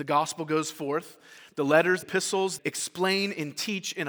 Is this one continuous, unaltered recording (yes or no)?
no